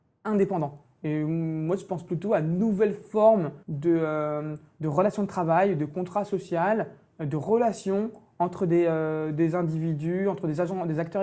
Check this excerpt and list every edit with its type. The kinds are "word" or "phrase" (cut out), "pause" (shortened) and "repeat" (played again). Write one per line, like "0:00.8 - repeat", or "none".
0:03.6 - pause